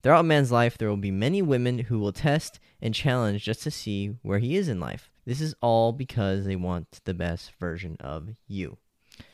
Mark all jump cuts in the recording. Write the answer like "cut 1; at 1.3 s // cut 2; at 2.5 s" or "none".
cut 1; at 5.2 s